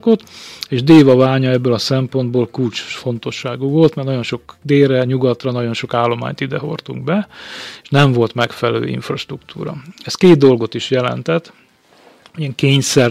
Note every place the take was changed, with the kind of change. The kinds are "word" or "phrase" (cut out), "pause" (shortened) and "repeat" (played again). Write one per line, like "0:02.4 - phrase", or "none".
none